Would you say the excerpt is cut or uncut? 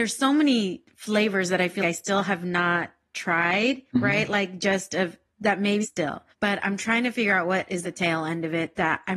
cut